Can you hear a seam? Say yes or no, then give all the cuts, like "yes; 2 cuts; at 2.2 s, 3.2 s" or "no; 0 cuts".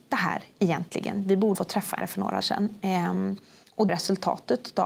yes; 4 cuts; at 1.5 s, 2.0 s, 2.4 s, 3.9 s